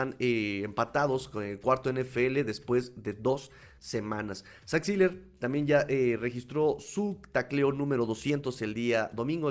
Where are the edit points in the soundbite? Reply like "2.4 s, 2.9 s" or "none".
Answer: none